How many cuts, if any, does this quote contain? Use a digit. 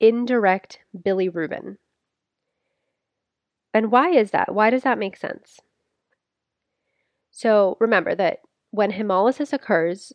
0